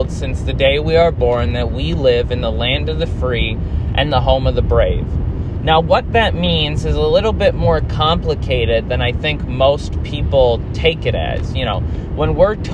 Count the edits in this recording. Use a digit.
0